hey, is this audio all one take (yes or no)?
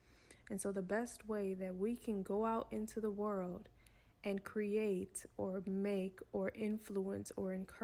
yes